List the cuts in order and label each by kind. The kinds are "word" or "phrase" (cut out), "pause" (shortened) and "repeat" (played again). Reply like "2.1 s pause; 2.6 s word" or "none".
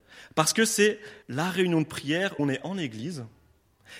1.2 s pause; 2.4 s word

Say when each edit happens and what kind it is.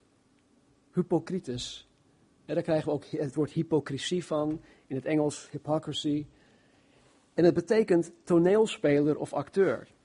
none

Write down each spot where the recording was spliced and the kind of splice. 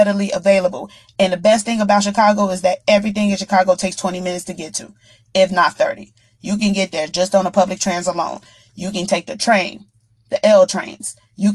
none

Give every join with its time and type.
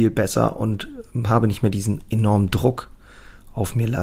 none

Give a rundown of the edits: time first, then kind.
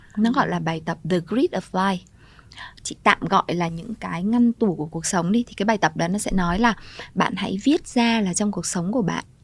1.0 s pause

